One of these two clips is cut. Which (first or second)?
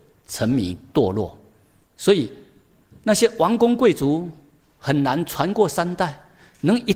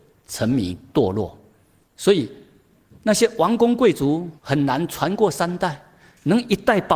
second